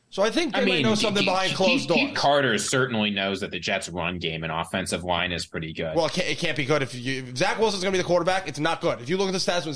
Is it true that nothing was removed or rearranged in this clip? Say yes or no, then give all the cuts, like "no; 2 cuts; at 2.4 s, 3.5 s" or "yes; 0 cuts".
yes; 0 cuts